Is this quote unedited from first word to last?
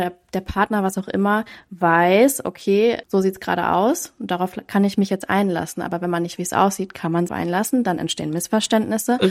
no; 3 cuts; at 3.0 s, 6.4 s, 7.3 s

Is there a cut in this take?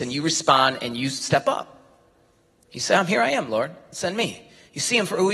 no; 0 cuts

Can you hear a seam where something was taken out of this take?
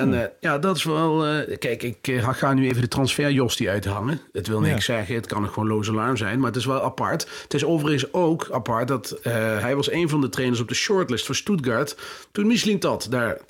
no; 0 cuts

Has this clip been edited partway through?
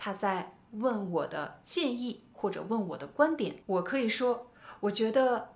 yes; 1 cut; at 3.6 s

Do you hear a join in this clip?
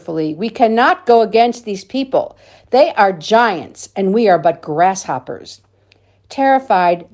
no; 0 cuts

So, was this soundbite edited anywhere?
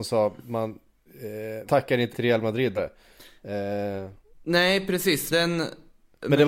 yes; 4 cuts; at 1.7 s, 2.1 s, 2.8 s, 5.3 s

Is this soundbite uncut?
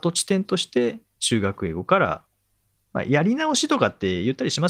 no; 1 cut; at 2.6 s

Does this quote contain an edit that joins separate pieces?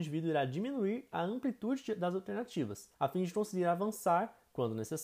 yes; 1 cut; at 2.9 s

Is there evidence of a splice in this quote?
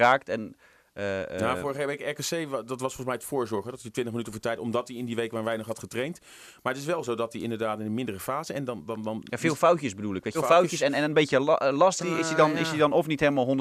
yes; 2 cuts; at 10.3 s, 12.0 s

